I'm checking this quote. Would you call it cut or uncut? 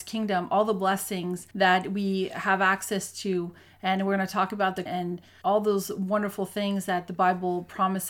cut